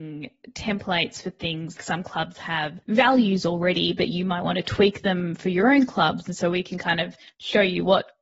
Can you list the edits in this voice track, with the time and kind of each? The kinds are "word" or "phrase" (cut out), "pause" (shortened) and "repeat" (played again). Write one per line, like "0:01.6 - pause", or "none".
0:01.8 - word
0:02.8 - pause

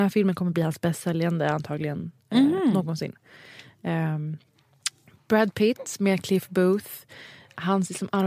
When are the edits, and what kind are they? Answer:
none

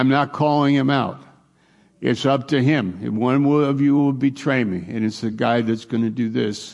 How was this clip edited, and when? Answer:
none

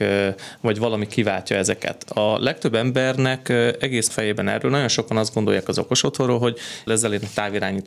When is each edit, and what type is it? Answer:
0:04.1 - phrase
0:06.9 - word

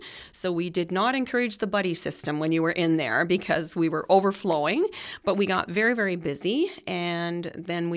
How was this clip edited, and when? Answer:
none

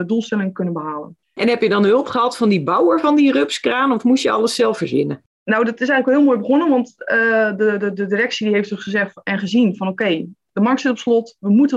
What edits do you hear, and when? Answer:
0:01.2 - pause

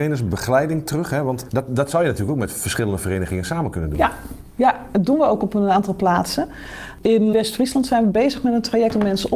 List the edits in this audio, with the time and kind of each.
0:01.5 - word
0:07.3 - word

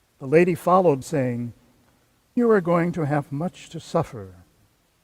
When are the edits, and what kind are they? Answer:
0:01.0 - word
0:02.4 - word

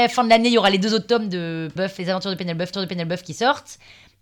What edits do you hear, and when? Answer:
0:01.8 - word
0:02.7 - repeat

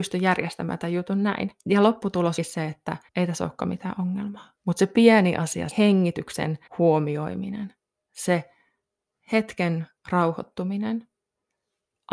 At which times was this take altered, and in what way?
0:01.6 - pause
0:02.4 - word
0:03.1 - pause
0:04.6 - pause
0:05.7 - word
0:06.7 - pause
0:10.0 - pause

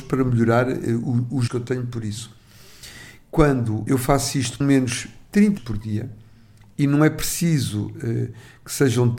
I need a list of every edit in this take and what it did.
0:01.5 - word
0:03.9 - word
0:04.6 - word
0:05.6 - word

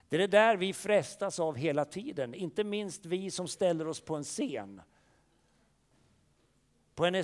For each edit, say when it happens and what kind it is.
none

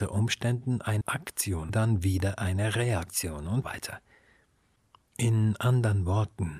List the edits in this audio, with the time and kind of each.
0:01.0 - word
0:01.7 - phrase
0:03.6 - word

